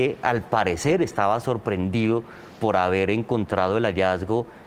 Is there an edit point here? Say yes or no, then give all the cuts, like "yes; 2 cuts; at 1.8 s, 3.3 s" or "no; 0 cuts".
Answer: no; 0 cuts